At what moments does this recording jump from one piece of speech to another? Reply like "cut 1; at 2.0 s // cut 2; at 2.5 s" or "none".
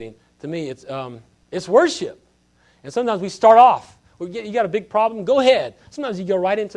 none